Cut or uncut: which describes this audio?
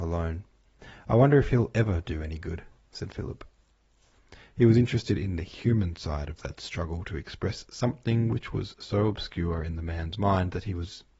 uncut